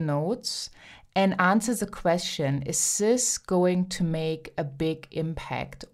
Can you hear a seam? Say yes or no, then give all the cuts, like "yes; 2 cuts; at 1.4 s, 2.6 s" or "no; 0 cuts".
no; 0 cuts